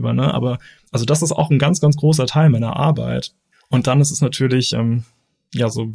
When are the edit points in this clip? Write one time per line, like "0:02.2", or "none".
none